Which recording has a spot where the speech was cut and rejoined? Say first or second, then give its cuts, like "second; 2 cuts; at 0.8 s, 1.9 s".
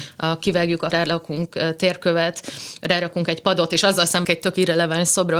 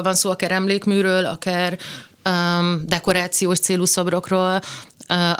first; 2 cuts; at 0.9 s, 4.2 s